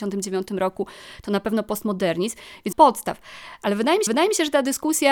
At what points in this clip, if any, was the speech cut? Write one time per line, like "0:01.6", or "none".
0:02.7
0:04.1